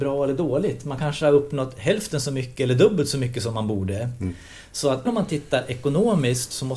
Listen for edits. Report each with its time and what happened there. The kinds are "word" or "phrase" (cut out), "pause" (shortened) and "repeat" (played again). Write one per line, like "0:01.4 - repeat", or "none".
0:05.1 - word